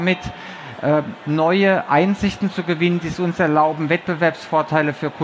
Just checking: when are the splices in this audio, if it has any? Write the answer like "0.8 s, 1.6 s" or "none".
none